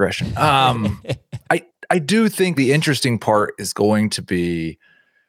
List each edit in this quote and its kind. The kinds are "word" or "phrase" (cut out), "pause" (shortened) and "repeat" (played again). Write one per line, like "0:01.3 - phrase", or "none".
0:02.5 - word